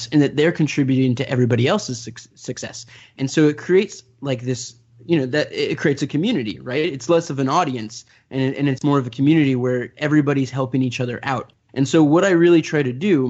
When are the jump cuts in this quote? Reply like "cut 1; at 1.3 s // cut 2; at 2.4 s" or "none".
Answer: none